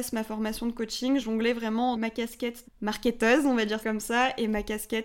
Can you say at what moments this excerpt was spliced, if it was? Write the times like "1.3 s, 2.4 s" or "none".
1.2 s, 1.9 s, 2.6 s, 3.8 s